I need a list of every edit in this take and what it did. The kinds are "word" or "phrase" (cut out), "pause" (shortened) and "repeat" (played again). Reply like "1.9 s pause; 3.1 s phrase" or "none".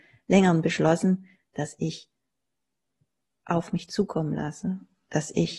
none